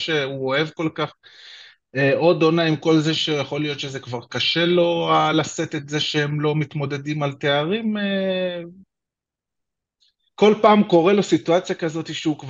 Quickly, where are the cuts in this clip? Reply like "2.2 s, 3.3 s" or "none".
none